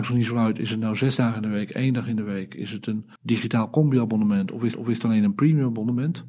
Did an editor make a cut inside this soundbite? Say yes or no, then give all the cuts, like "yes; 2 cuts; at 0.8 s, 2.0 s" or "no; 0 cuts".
yes; 2 cuts; at 3.2 s, 4.7 s